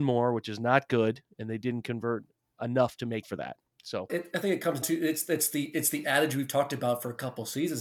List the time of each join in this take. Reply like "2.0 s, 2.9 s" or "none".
3.2 s, 4.1 s, 4.8 s